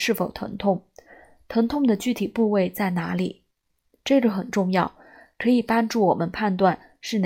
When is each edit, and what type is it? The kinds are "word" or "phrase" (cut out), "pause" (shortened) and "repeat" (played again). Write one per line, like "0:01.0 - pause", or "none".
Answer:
none